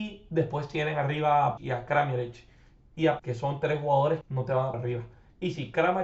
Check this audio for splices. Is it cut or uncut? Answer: cut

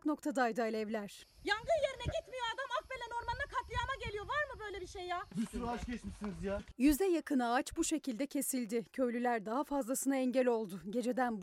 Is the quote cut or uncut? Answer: uncut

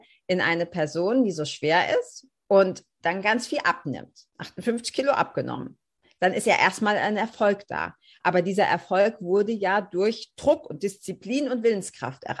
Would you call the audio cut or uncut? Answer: cut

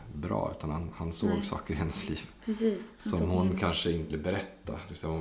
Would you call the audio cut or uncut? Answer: cut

